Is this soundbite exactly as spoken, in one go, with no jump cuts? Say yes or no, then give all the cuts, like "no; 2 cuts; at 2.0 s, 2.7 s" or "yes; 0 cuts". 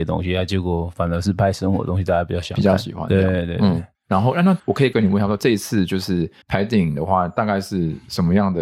no; 3 cuts; at 3.9 s, 4.6 s, 6.4 s